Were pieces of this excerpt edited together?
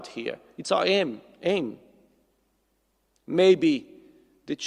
no; 0 cuts

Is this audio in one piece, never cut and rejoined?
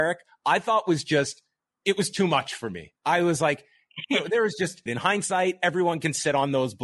no; 1 cut; at 4.9 s

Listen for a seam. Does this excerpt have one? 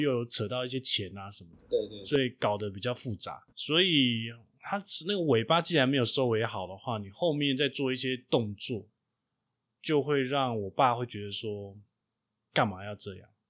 yes; 1 cut; at 3.5 s

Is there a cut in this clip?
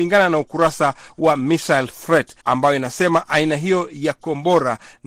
yes; 1 cut; at 2.4 s

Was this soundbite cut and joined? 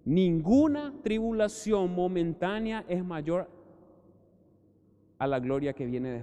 no; 0 cuts

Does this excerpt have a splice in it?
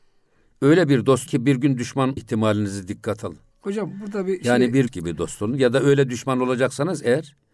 yes; 4 cuts; at 1.3 s, 2.2 s, 3.5 s, 4.9 s

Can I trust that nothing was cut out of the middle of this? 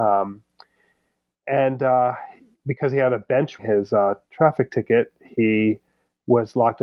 no; 3 cuts; at 2.5 s, 3.6 s, 4.2 s

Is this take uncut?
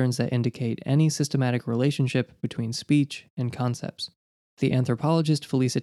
yes; 0 cuts

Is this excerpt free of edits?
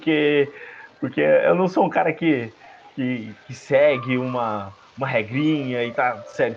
yes; 0 cuts

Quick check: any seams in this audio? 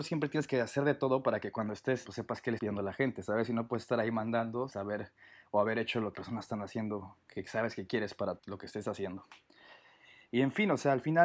yes; 5 cuts; at 2.0 s, 2.6 s, 4.7 s, 6.1 s, 8.4 s

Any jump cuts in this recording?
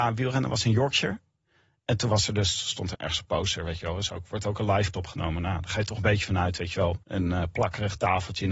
yes; 3 cuts; at 2.9 s, 4.9 s, 7.0 s

